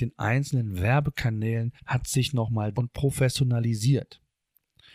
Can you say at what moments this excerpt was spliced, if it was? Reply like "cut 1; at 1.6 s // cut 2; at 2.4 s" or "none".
cut 1; at 1.8 s // cut 2; at 2.7 s